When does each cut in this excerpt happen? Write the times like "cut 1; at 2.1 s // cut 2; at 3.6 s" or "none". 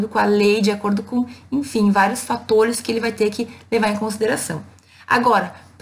none